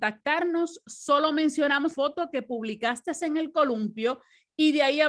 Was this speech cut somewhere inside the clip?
yes; 1 cut; at 1.9 s

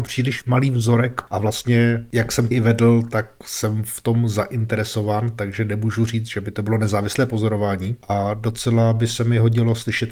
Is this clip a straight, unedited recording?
no; 1 cut; at 2.5 s

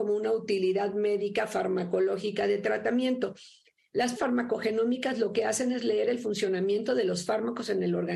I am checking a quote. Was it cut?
yes; 1 cut; at 4.2 s

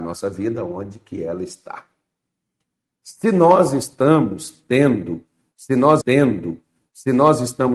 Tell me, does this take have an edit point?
yes; 1 cut; at 6.0 s

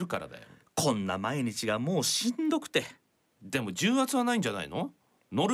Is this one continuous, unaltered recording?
yes; 0 cuts

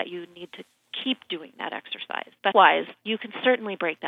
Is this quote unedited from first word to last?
no; 1 cut; at 2.5 s

